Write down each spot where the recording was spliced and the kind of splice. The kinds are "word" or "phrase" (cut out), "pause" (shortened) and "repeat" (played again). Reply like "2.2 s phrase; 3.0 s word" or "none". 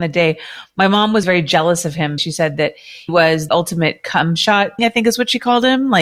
1.2 s word; 2.2 s word; 3.1 s word; 3.5 s word; 4.8 s word